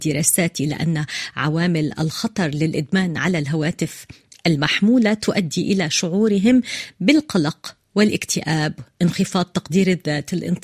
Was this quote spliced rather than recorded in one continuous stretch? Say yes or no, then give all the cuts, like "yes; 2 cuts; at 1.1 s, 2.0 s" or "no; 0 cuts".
no; 0 cuts